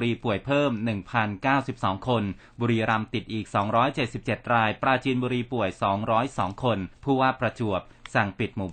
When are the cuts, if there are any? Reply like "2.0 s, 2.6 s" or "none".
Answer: 6.9 s